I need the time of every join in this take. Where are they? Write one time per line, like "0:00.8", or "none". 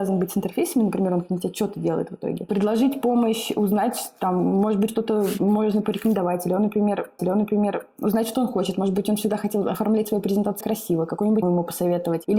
0:04.9
0:07.2
0:10.6
0:11.4